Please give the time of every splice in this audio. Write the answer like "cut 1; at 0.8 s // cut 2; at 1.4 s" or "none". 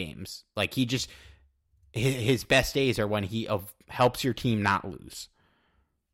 none